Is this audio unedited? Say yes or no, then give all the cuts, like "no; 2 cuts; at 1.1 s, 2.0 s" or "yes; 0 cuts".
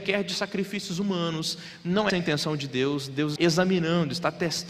no; 2 cuts; at 2.1 s, 3.4 s